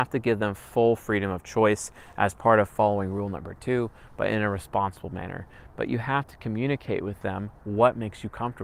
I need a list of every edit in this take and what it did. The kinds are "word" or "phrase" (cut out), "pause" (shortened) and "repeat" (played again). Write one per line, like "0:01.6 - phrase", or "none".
none